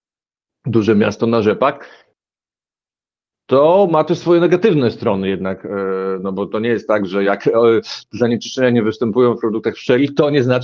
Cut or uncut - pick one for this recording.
uncut